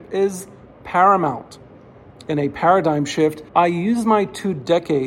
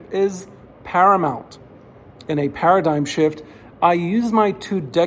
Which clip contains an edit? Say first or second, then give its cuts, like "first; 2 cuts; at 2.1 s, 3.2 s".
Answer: first; 1 cut; at 3.5 s